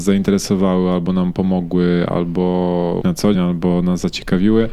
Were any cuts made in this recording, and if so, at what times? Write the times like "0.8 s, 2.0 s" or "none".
3.0 s, 3.3 s